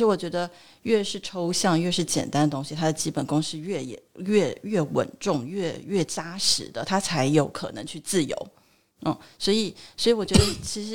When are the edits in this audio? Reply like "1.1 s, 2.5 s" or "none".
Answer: none